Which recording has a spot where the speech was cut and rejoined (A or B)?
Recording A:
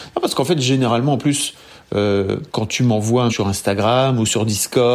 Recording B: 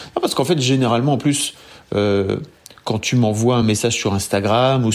A